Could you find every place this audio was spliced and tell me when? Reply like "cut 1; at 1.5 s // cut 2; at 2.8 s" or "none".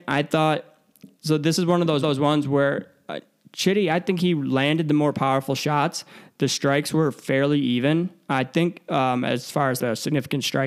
cut 1; at 2.0 s // cut 2; at 9.8 s